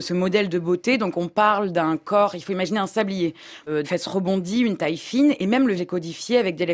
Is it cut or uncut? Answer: cut